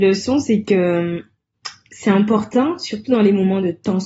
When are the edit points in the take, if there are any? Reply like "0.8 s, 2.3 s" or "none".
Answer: none